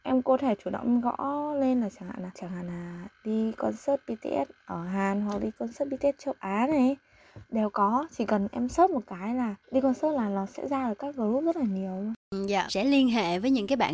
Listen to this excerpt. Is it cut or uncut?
cut